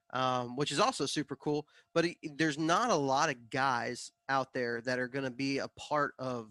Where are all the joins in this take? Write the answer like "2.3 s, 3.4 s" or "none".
none